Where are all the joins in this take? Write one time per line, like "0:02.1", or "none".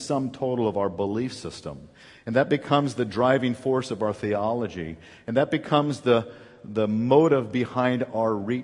none